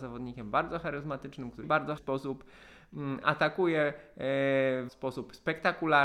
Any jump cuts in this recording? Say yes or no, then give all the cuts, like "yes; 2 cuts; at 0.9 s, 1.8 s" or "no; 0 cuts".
yes; 3 cuts; at 1.6 s, 2.0 s, 4.9 s